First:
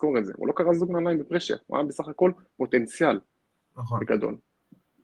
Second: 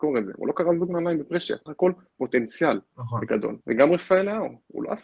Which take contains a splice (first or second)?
second